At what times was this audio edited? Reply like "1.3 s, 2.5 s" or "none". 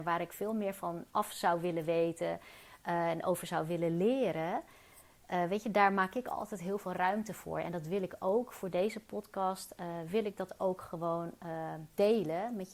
none